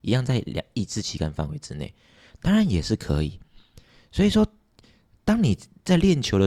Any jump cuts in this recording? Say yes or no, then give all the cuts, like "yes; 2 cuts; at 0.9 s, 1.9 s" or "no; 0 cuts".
no; 0 cuts